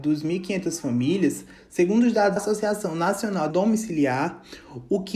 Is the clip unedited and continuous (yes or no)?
no